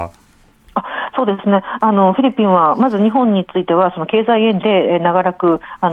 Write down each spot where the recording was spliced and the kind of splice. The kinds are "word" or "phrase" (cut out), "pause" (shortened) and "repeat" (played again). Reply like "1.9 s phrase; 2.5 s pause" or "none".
4.6 s word